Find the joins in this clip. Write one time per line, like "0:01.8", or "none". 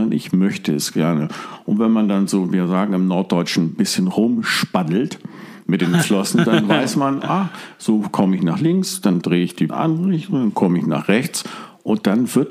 0:09.7